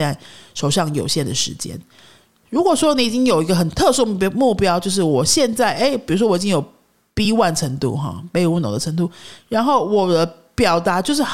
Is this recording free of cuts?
yes; 0 cuts

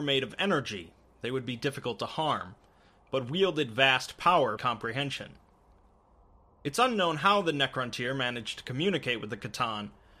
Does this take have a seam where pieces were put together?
yes; 1 cut; at 4.6 s

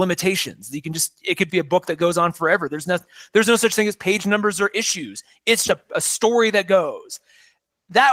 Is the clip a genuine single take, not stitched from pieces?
no; 2 cuts; at 1.5 s, 5.7 s

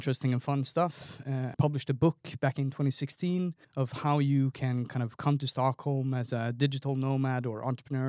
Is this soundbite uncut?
no; 2 cuts; at 1.5 s, 3.6 s

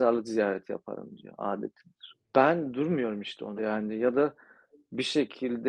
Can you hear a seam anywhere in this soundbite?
yes; 2 cuts; at 2.3 s, 3.6 s

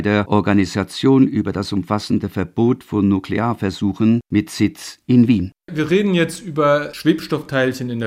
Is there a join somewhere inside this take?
no; 0 cuts

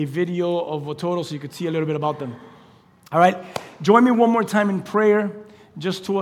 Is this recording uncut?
yes; 0 cuts

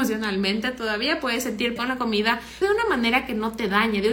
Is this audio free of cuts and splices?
no; 2 cuts; at 1.8 s, 2.6 s

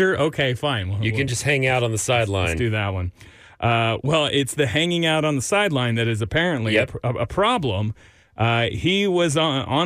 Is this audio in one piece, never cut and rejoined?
yes; 0 cuts

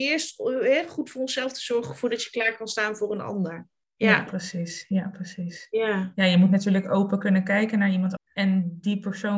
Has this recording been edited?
yes; 1 cut; at 8.2 s

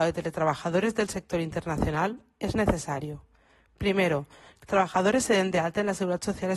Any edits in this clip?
yes; 1 cut; at 4.7 s

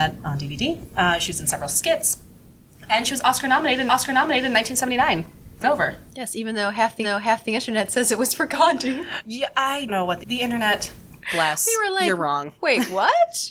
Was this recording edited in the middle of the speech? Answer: yes; 5 cuts; at 3.9 s, 5.6 s, 7.0 s, 9.9 s, 10.2 s

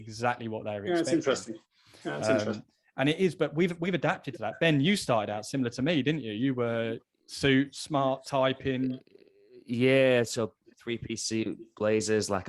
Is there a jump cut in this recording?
no; 0 cuts

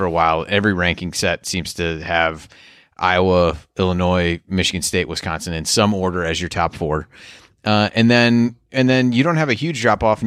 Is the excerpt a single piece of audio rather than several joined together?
yes; 0 cuts

